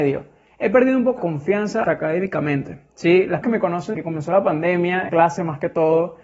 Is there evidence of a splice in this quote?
yes; 5 cuts; at 1.2 s, 1.8 s, 3.4 s, 3.9 s, 5.1 s

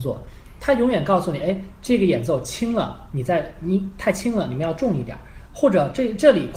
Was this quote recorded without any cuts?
yes; 0 cuts

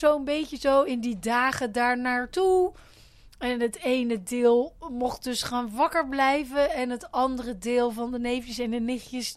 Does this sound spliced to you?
no; 0 cuts

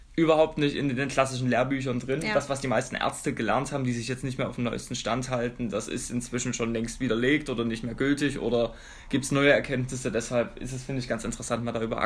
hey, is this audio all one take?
yes; 0 cuts

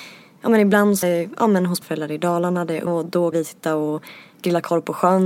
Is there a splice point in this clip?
yes; 4 cuts; at 1.0 s, 1.8 s, 2.9 s, 3.3 s

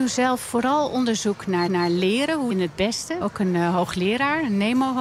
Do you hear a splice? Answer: yes; 3 cuts; at 1.7 s, 2.5 s, 3.2 s

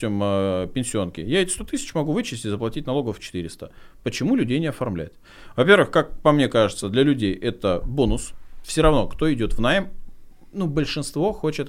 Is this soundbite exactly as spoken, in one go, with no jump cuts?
yes; 0 cuts

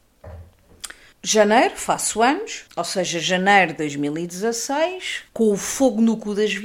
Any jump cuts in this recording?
yes; 3 cuts; at 1.1 s, 2.7 s, 5.3 s

